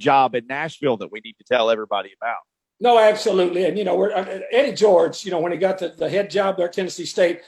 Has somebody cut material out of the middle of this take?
no; 0 cuts

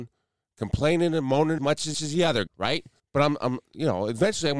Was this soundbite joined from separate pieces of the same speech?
yes; 4 cuts; at 1.6 s, 1.9 s, 2.5 s, 3.0 s

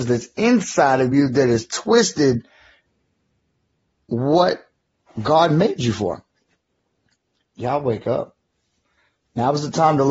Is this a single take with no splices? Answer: yes; 0 cuts

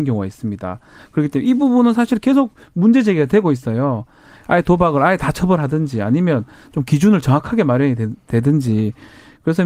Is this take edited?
no; 0 cuts

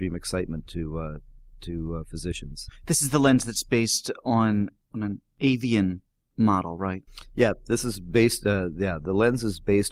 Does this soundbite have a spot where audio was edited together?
no; 0 cuts

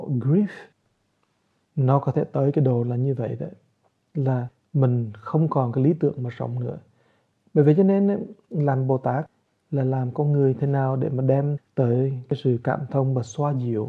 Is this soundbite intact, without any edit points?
yes; 0 cuts

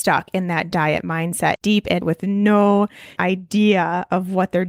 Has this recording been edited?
yes; 3 cuts; at 1.5 s, 2.0 s, 3.2 s

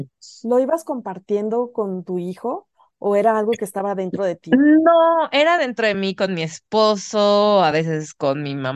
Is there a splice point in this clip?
no; 0 cuts

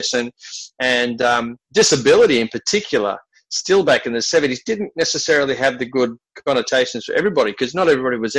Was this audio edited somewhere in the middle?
no; 0 cuts

